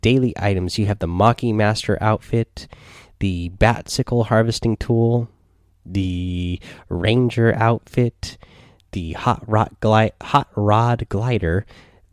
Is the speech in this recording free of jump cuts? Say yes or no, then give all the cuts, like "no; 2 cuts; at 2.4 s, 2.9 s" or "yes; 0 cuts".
yes; 0 cuts